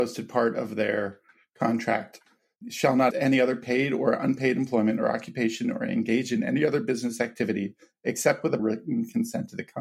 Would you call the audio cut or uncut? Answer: cut